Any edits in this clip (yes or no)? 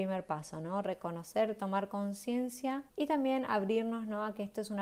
yes